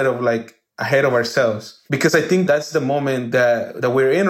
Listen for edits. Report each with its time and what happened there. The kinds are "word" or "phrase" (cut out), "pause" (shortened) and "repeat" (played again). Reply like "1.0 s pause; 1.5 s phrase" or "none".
1.9 s pause